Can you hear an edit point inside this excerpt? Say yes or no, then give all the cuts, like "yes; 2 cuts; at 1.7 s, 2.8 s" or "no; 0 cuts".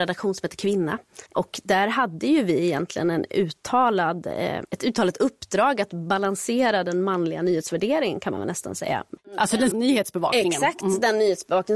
yes; 2 cuts; at 1.3 s, 9.7 s